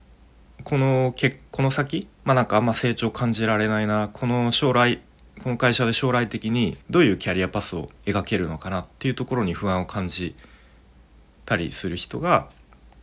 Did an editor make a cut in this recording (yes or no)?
yes